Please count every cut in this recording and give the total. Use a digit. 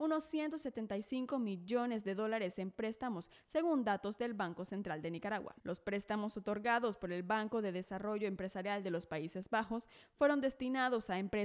1